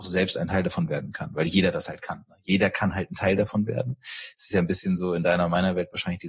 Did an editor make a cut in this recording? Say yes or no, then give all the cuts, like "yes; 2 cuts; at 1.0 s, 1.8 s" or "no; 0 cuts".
no; 0 cuts